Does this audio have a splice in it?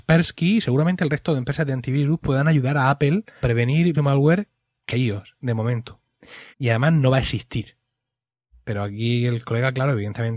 yes; 4 cuts; at 3.4 s, 3.9 s, 4.9 s, 6.5 s

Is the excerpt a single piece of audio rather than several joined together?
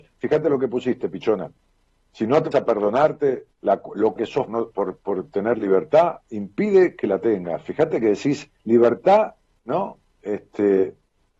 no; 5 cuts; at 1.6 s, 2.5 s, 4.2 s, 4.5 s, 8.6 s

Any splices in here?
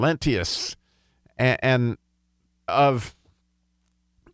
yes; 1 cut; at 2.7 s

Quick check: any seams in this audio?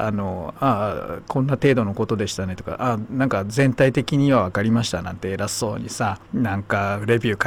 yes; 1 cut; at 6.2 s

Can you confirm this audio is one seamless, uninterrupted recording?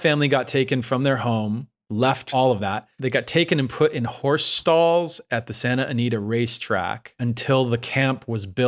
yes; 0 cuts

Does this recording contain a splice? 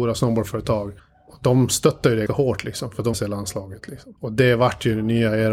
yes; 4 cuts; at 1.0 s, 2.3 s, 3.1 s, 4.2 s

